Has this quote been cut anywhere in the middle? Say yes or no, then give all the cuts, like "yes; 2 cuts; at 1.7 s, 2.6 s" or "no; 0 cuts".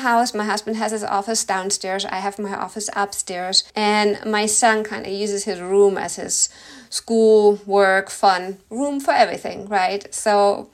yes; 1 cut; at 3.7 s